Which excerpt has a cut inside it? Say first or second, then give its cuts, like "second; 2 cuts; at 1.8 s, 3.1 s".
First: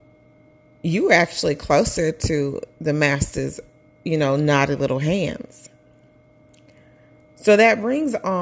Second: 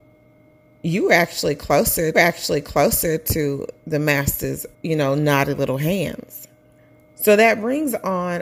second; 3 cuts; at 2.1 s, 4.7 s, 6.8 s